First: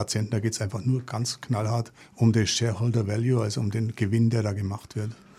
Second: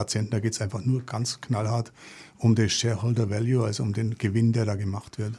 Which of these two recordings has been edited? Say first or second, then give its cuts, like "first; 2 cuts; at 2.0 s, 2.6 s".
first; 1 cut; at 2.0 s